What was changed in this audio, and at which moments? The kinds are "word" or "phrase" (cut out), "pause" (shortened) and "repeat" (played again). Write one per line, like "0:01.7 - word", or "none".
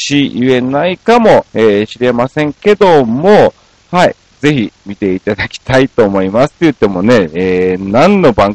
0:01.5 - pause